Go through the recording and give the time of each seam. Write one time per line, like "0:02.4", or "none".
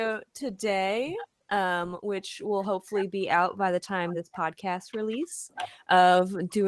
none

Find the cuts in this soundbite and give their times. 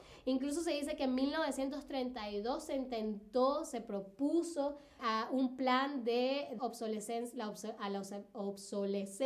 0:05.0
0:06.6

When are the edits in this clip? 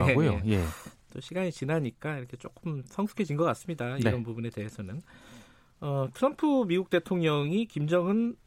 none

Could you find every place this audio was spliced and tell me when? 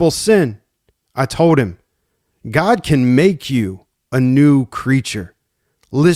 none

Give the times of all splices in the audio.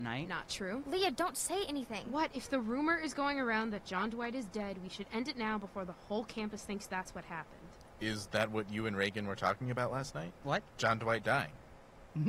0:10.7

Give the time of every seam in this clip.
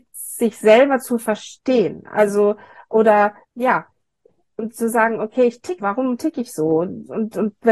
0:03.4
0:05.8

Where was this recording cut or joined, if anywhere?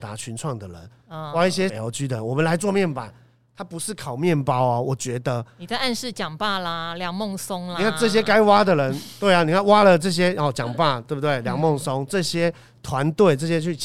0:01.7

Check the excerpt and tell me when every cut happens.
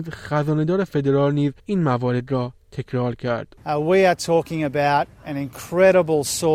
0:01.6

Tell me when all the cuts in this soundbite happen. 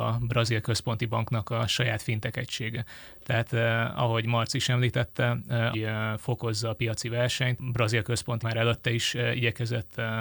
0:05.7
0:08.4

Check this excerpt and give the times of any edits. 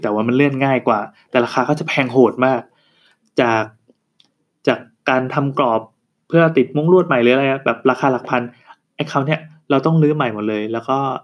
none

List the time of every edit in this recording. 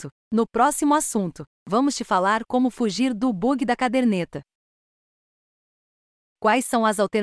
none

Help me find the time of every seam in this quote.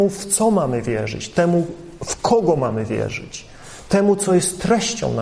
none

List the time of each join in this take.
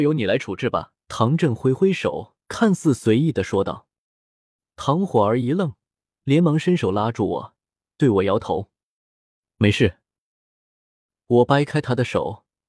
0:01.0
0:02.4

